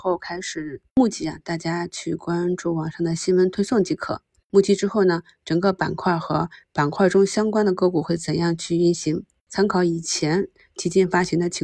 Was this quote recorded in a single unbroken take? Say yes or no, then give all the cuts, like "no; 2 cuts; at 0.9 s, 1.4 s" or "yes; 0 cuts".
yes; 0 cuts